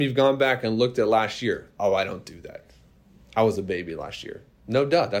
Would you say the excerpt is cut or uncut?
uncut